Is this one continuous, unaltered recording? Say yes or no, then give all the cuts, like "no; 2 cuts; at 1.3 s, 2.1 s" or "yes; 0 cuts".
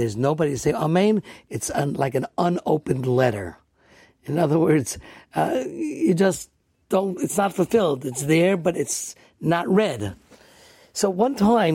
yes; 0 cuts